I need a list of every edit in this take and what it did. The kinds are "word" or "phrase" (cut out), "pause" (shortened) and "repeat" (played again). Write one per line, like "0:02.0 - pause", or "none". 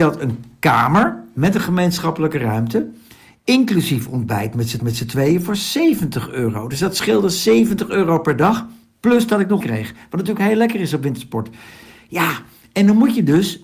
0:04.8 - repeat
0:09.6 - word